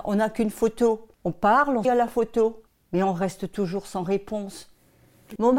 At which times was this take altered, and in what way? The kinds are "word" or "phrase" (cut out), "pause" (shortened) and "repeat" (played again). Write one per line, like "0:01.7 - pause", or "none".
0:01.1 - pause
0:01.8 - word
0:02.7 - pause